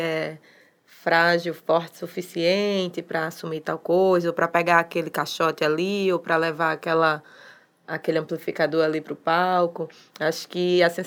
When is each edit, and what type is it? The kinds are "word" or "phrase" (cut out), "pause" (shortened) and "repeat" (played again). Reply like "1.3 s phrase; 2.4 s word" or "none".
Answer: none